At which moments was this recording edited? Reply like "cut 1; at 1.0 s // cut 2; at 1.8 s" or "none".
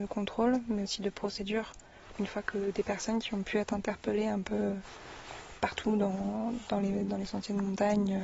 none